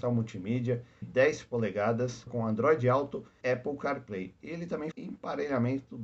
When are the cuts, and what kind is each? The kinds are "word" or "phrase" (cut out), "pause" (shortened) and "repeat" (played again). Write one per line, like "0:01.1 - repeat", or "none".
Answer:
0:01.0 - word
0:02.3 - word
0:03.4 - word
0:04.9 - word

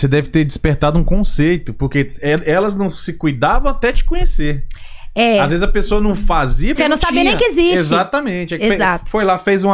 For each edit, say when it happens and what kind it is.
0:06.8 - word

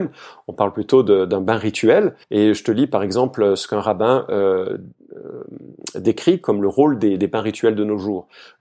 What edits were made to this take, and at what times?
0:02.2 - pause

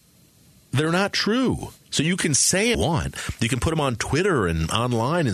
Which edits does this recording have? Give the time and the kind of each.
0:01.8 - pause
0:02.7 - phrase

